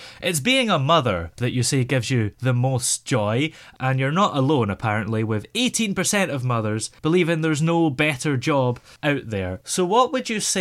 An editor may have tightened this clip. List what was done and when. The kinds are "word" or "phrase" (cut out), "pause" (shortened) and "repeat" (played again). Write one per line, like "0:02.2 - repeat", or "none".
none

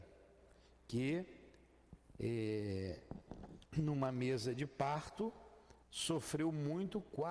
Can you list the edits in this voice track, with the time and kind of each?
0:05.8 - pause

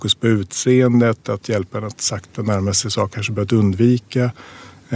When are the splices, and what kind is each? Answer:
0:03.1 - word

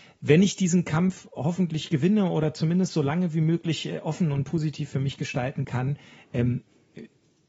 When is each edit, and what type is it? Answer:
none

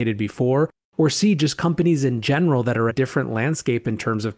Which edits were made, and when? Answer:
0:02.9 - phrase

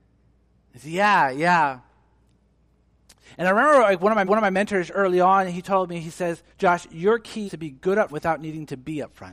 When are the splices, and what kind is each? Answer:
0:04.2 - repeat
0:06.5 - pause
0:07.5 - word
0:08.1 - word

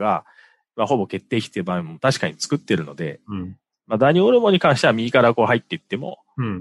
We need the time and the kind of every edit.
none

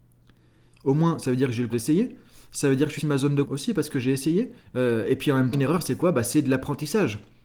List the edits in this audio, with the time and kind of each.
0:01.7 - word
0:03.0 - word
0:03.4 - word
0:04.6 - pause
0:05.5 - word

